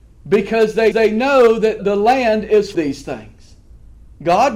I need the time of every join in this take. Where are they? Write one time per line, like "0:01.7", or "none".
0:00.9
0:01.8
0:02.7